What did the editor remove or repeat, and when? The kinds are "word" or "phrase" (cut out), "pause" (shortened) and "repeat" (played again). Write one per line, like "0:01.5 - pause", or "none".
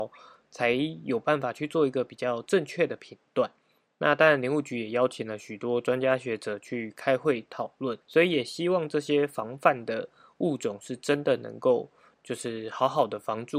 0:08.0 - pause